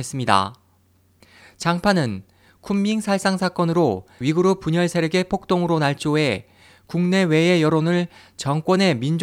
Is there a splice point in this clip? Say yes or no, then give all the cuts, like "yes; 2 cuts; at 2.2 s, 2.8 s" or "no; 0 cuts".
yes; 1 cut; at 4.2 s